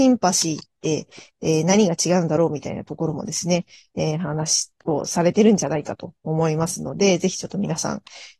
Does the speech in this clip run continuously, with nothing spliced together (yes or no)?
yes